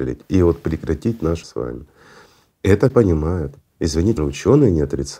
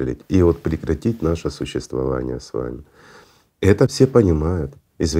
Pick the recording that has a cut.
first; 3 cuts; at 1.4 s, 2.9 s, 4.2 s

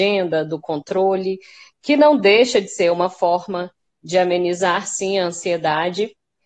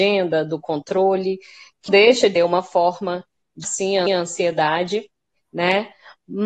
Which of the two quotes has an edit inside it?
second; 4 cuts; at 1.9 s, 2.4 s, 3.6 s, 4.1 s

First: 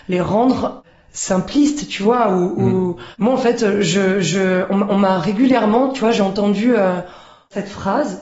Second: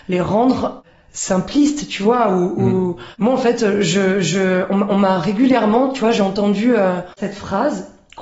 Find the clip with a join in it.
second; 1 cut; at 7.1 s

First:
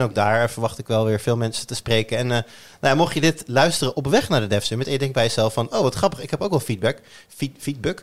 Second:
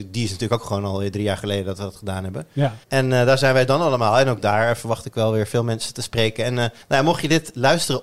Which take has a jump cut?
second; 2 cuts; at 2.8 s, 6.8 s

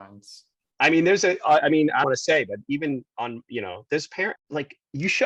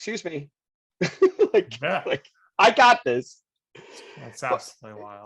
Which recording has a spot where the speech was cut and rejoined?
first; 2 cuts; at 2.0 s, 4.4 s

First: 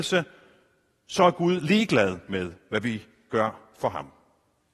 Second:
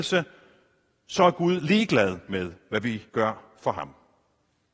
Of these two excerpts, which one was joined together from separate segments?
second; 1 cut; at 3.1 s

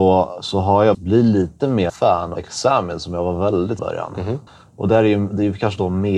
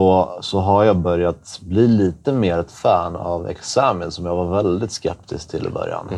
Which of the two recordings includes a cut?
first; 5 cuts; at 0.9 s, 1.9 s, 2.4 s, 3.8 s, 4.5 s

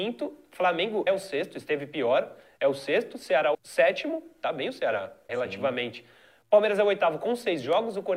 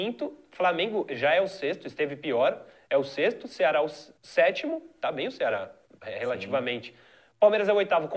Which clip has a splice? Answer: first; 3 cuts; at 1.1 s, 3.5 s, 5.3 s

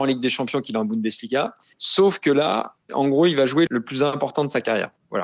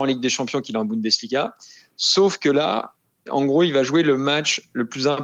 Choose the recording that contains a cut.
first; 3 cuts; at 1.7 s, 2.8 s, 3.7 s

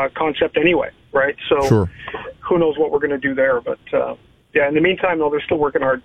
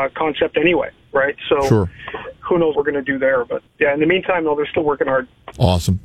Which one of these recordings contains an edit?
second; 2 cuts; at 2.7 s, 3.7 s

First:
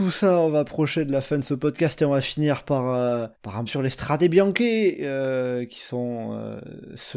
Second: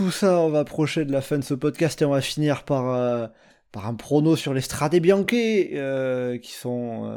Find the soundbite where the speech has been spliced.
first; 2 cuts; at 3.3 s, 3.7 s

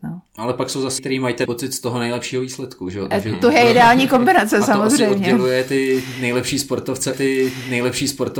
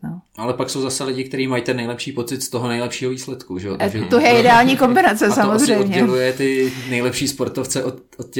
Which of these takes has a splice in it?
first; 3 cuts; at 1.0 s, 1.5 s, 7.1 s

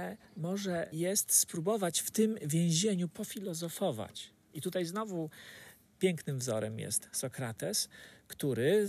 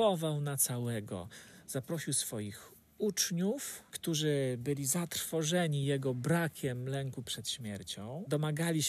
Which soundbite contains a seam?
first; 1 cut; at 0.9 s

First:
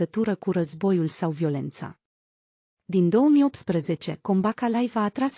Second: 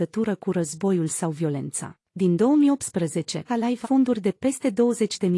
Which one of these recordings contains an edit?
second; 3 cuts; at 2.0 s, 3.5 s, 3.8 s

